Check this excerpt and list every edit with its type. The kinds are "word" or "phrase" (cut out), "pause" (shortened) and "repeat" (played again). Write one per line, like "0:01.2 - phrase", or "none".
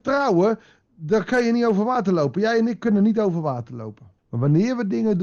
0:04.2 - pause

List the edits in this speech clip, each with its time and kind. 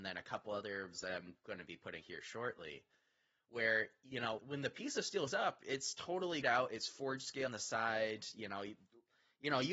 0:00.9 - word
0:02.0 - word
0:04.4 - word
0:05.3 - word
0:06.4 - word
0:07.5 - word

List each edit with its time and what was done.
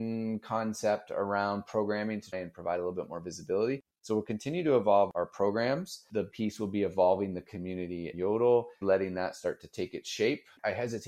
0:02.3 - word
0:06.3 - word
0:08.1 - word
0:08.8 - word

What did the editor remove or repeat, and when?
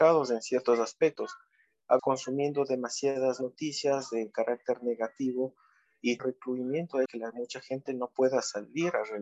0:02.0 - word
0:06.2 - phrase
0:07.1 - word

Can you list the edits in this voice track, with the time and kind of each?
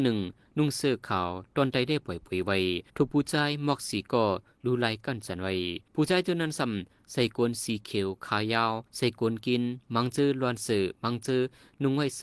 0:02.9 - pause
0:05.9 - pause
0:08.9 - pause

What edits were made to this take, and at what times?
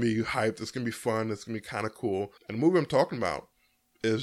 0:02.4 - pause

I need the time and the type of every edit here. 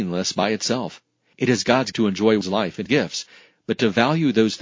0:01.9 - word
0:02.4 - word
0:02.9 - word

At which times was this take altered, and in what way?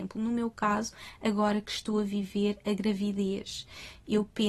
none

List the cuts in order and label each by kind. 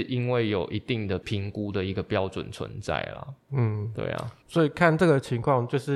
0:04.4 - pause

